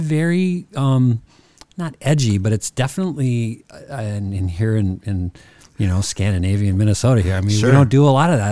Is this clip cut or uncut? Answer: uncut